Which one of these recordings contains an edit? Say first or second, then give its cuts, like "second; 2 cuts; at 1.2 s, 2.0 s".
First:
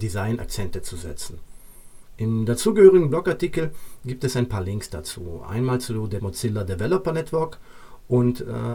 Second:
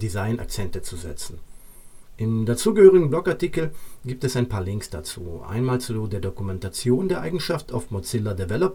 first; 1 cut; at 6.2 s